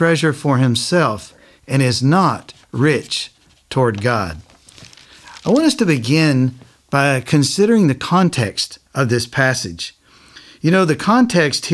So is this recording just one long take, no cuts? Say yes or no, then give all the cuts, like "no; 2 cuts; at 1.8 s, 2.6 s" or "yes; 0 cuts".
yes; 0 cuts